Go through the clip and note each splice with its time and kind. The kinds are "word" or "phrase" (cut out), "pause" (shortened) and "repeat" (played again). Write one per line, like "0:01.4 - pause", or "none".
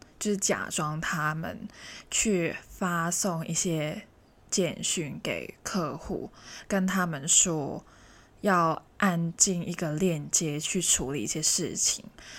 none